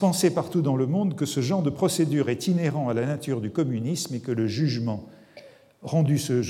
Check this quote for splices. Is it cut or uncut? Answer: uncut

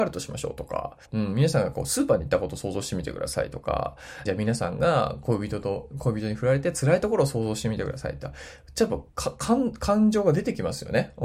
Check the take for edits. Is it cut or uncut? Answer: cut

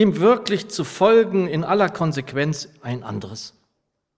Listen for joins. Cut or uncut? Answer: uncut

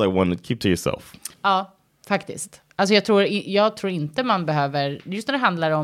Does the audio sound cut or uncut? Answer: cut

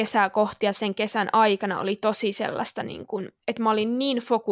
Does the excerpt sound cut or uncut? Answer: cut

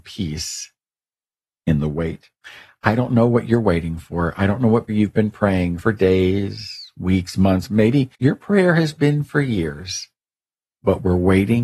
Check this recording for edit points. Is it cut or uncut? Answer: cut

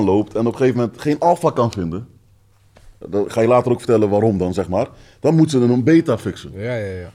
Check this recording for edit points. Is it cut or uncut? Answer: uncut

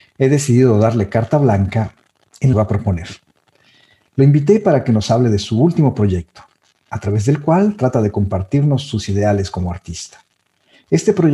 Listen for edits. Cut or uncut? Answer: cut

